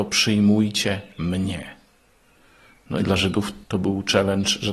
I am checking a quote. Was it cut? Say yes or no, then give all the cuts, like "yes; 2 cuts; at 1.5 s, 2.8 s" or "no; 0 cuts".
no; 0 cuts